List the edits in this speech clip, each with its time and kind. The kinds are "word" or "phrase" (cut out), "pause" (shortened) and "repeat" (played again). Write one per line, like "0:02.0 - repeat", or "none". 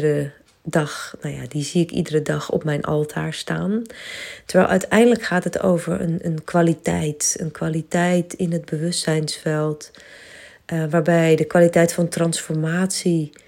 none